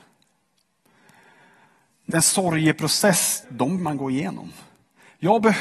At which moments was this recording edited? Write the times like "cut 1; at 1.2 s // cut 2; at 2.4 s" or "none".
cut 1; at 2.1 s // cut 2; at 3.4 s // cut 3; at 3.8 s